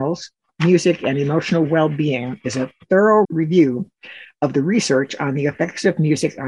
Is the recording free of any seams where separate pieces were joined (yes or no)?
no